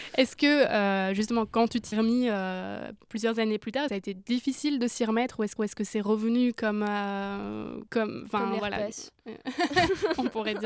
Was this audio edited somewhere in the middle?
yes; 4 cuts; at 1.9 s, 3.9 s, 5.6 s, 7.9 s

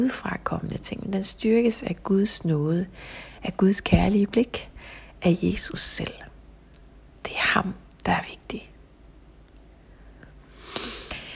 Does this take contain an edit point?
no; 0 cuts

